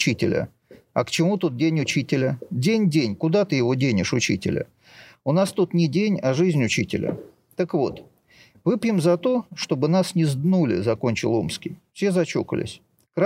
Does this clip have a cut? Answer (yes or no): no